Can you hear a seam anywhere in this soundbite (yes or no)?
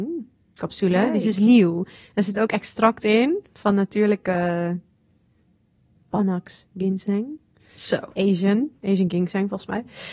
no